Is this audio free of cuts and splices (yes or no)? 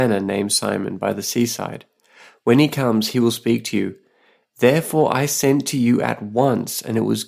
yes